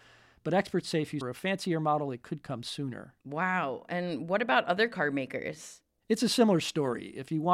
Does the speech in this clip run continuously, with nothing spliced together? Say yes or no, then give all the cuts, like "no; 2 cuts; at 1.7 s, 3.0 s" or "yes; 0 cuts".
no; 2 cuts; at 1.2 s, 3.2 s